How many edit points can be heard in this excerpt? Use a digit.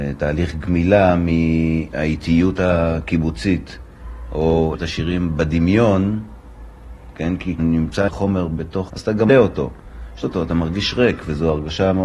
6